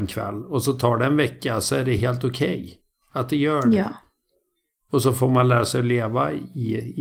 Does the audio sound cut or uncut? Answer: uncut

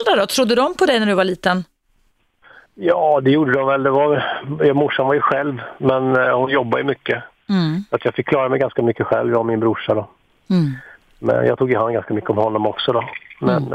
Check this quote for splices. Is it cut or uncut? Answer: uncut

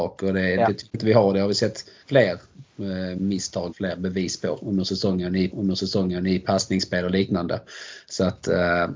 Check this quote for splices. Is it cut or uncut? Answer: cut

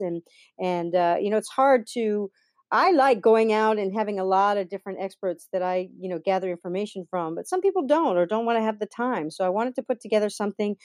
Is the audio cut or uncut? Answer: uncut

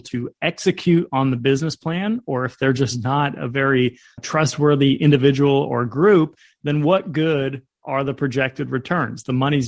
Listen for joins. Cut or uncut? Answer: uncut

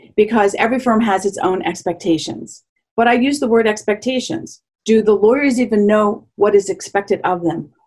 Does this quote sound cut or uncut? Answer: uncut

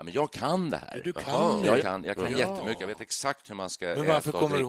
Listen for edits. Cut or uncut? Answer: cut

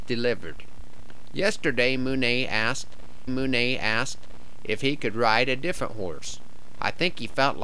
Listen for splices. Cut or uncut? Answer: cut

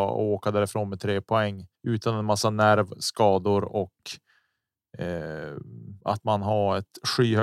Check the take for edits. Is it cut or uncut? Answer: cut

